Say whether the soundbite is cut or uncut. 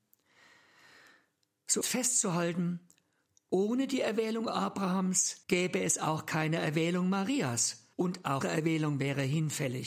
cut